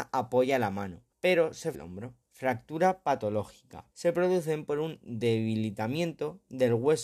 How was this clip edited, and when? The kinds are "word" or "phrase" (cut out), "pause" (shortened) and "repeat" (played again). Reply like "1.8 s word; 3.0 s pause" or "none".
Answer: 1.1 s pause; 1.7 s word; 2.2 s pause; 3.9 s pause